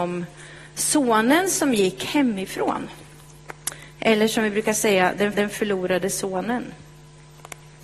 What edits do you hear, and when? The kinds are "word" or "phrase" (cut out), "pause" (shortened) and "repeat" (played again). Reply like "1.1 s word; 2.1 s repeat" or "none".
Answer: 5.3 s repeat